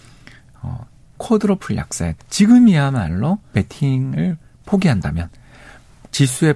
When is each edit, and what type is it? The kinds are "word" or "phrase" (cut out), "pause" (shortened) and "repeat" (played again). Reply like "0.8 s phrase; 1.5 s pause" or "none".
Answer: 1.2 s word; 2.2 s phrase; 3.5 s word